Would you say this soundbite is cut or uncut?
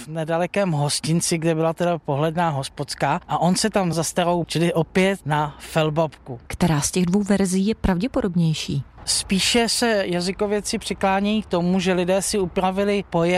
cut